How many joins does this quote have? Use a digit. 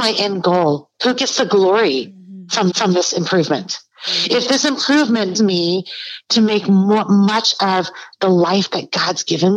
3